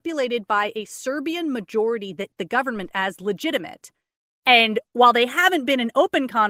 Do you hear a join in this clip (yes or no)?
yes